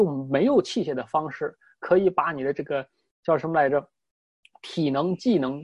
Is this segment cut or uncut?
uncut